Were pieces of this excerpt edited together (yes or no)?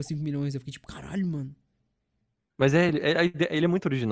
no